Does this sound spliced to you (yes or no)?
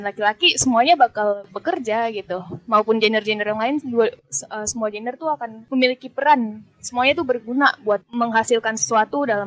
no